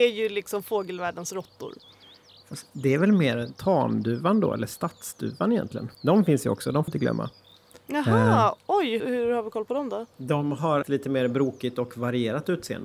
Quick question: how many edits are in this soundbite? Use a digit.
5